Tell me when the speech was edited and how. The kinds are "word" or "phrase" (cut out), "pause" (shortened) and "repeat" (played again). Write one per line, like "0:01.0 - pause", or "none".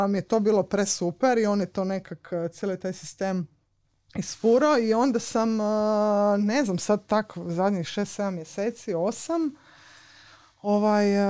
none